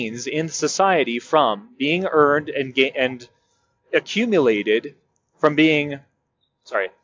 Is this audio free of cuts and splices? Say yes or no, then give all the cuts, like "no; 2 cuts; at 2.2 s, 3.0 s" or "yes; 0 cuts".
yes; 0 cuts